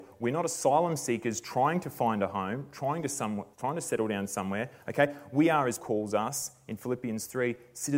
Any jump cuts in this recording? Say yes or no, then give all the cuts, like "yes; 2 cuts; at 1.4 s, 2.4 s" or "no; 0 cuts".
yes; 2 cuts; at 3.5 s, 5.8 s